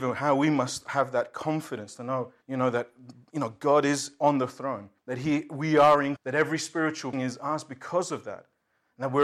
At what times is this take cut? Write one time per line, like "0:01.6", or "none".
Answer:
0:02.4
0:05.0
0:06.2
0:07.1